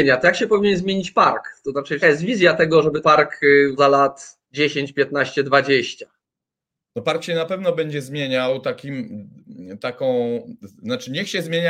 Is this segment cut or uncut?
cut